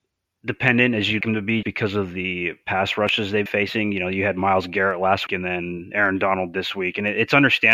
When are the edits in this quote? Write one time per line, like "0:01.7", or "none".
0:01.2
0:01.6
0:03.5
0:05.3